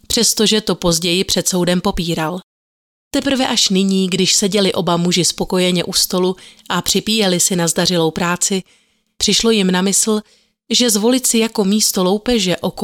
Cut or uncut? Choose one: uncut